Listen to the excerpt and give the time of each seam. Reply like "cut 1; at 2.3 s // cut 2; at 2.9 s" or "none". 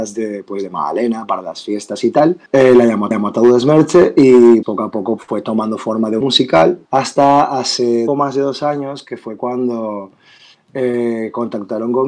cut 1; at 2.5 s // cut 2; at 3.1 s // cut 3; at 4.6 s // cut 4; at 5.2 s // cut 5; at 6.2 s // cut 6; at 6.9 s // cut 7; at 8.1 s